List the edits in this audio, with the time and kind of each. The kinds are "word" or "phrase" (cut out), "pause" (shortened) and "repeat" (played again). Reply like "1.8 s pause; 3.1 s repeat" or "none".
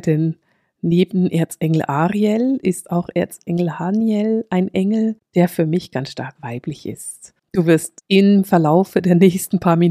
none